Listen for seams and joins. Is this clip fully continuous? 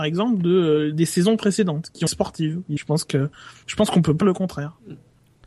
no; 3 cuts; at 2.1 s, 2.8 s, 4.2 s

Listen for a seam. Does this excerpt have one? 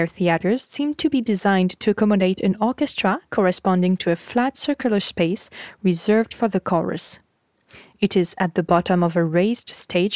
no; 0 cuts

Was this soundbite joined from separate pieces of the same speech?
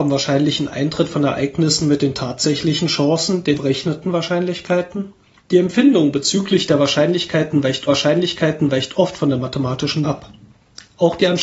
yes; 4 cuts; at 3.5 s, 5.4 s, 7.9 s, 10.0 s

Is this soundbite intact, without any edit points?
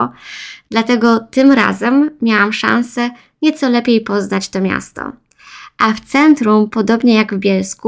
yes; 0 cuts

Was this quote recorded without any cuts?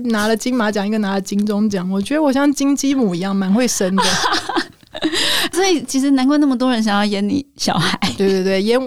no; 1 cut; at 5.5 s

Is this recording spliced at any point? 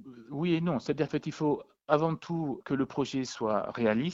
yes; 2 cuts; at 1.1 s, 2.6 s

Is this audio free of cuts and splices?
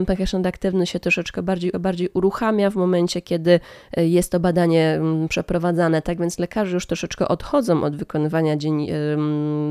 no; 1 cut; at 1.7 s

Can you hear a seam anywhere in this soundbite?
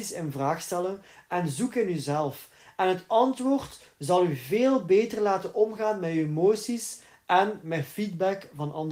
no; 0 cuts

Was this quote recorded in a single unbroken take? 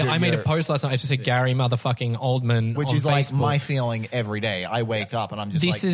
yes; 0 cuts

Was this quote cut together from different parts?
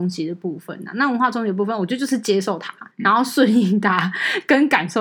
yes; 1 cut; at 2.9 s

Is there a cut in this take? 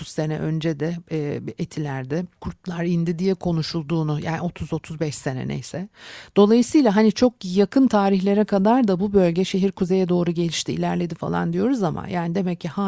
yes; 1 cut; at 2.3 s

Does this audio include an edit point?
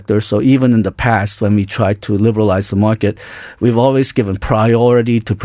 no; 0 cuts

